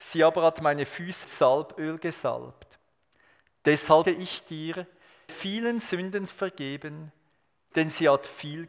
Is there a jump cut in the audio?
yes; 4 cuts; at 1.2 s, 4.0 s, 5.3 s, 6.3 s

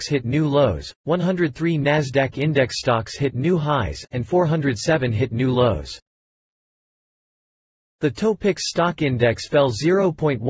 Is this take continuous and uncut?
yes; 0 cuts

